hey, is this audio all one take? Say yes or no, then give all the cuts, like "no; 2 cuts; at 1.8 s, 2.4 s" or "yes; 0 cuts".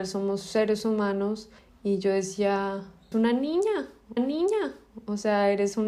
no; 3 cuts; at 1.6 s, 3.1 s, 4.2 s